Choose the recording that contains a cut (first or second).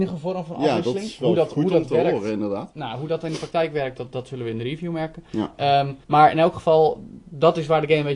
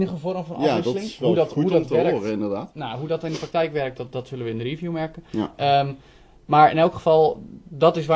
first